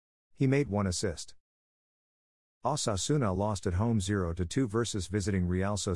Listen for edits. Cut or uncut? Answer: uncut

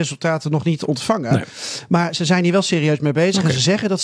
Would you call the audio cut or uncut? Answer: uncut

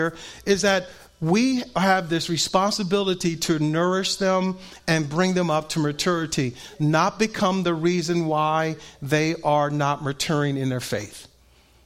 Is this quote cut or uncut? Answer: uncut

